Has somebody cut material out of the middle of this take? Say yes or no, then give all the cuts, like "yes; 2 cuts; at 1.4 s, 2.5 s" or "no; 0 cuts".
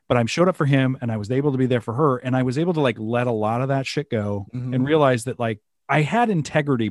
yes; 1 cut; at 5.7 s